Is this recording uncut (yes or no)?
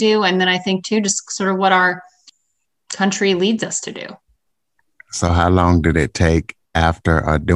yes